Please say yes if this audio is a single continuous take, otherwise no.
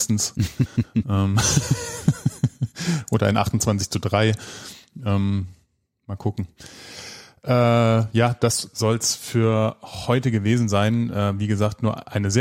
yes